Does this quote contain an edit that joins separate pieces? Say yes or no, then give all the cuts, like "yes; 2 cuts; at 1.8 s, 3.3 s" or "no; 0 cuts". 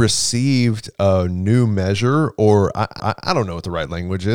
yes; 1 cut; at 3.0 s